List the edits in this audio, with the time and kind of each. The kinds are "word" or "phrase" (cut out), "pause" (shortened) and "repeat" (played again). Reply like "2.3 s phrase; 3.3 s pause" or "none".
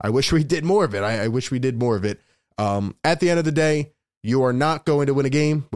none